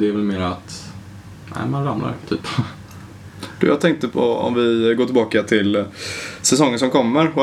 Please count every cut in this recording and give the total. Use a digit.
1